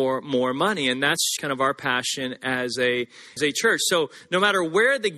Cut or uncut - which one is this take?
cut